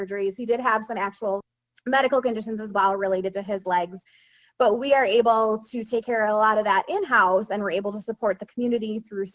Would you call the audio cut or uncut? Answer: uncut